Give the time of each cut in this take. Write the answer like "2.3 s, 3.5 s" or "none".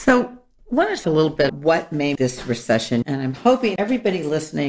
1.0 s, 1.5 s, 2.2 s, 3.0 s, 3.8 s